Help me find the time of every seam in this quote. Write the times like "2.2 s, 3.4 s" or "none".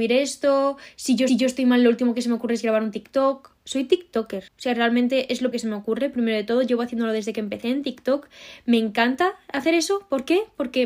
1.3 s, 4.5 s, 5.5 s